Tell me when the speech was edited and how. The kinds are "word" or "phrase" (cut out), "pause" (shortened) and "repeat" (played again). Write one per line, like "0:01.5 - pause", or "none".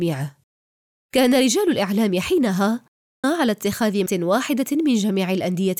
0:03.2 - word
0:04.1 - word